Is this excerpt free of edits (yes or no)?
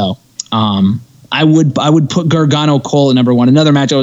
yes